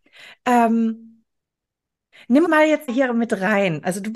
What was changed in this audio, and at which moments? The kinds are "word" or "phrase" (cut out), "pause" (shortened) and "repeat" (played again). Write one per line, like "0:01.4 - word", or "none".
0:02.4 - word
0:02.9 - word